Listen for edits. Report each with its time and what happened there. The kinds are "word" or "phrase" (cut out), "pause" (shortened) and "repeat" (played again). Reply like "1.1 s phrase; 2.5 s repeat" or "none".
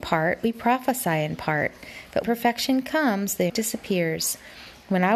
2.2 s word; 3.5 s word